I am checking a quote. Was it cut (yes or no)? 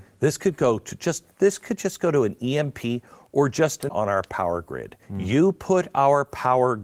yes